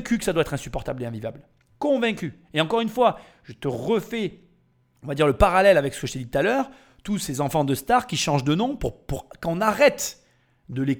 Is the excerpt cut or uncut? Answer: uncut